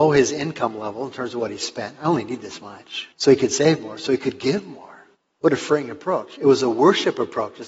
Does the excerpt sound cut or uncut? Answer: cut